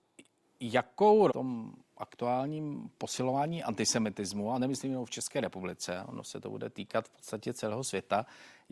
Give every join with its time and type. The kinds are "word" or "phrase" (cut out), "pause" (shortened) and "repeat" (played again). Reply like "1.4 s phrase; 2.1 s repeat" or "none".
1.3 s phrase